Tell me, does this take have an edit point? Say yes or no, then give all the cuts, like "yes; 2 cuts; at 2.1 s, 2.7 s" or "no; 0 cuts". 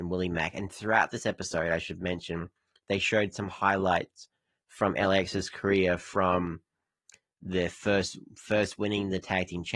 no; 0 cuts